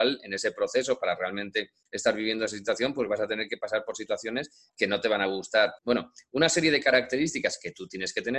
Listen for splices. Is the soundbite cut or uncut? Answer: cut